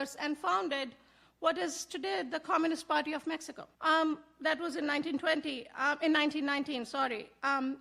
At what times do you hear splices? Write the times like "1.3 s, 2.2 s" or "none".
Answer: 3.7 s